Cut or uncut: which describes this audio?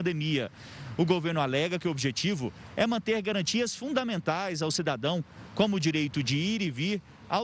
uncut